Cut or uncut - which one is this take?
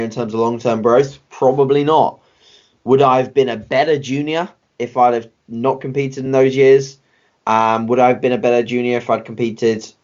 uncut